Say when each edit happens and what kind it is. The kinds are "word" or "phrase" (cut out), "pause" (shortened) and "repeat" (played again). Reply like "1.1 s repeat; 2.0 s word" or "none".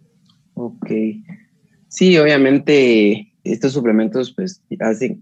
3.4 s word